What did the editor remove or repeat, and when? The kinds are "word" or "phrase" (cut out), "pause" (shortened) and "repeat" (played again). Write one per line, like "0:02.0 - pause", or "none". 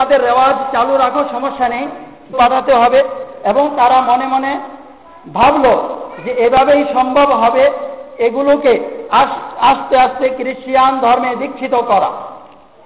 0:02.3 - phrase